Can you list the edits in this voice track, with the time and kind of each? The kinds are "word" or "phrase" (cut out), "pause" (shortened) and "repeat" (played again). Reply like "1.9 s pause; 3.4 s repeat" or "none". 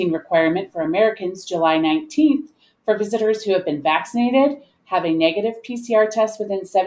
none